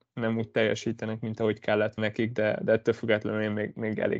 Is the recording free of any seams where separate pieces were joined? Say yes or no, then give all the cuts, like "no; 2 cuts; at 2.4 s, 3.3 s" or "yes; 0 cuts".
no; 1 cut; at 2.0 s